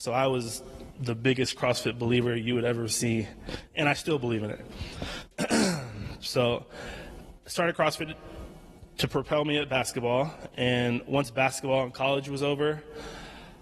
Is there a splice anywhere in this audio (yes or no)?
no